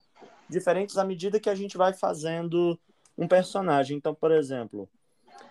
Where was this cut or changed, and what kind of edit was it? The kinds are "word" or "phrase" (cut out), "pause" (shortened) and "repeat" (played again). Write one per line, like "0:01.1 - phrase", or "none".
0:00.9 - word